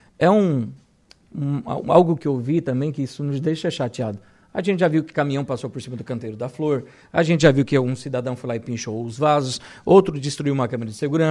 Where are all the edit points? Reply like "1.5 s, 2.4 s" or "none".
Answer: none